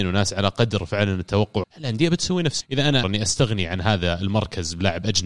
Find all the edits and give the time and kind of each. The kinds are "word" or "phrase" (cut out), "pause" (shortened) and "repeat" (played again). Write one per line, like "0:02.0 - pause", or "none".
0:01.6 - word
0:02.6 - word
0:03.0 - word